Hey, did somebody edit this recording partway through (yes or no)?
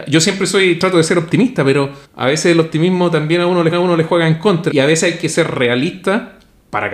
yes